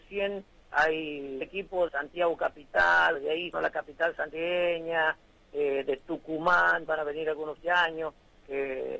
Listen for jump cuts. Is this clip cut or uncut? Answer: cut